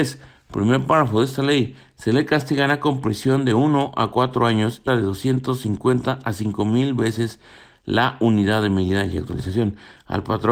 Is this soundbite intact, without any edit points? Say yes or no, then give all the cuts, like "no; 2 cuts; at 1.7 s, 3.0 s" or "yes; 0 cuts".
no; 1 cut; at 4.9 s